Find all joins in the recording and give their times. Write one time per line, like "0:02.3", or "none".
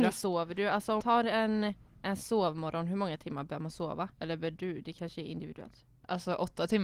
0:01.0
0:04.1